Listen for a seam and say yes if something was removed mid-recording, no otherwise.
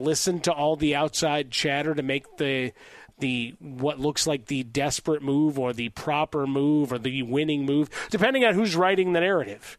no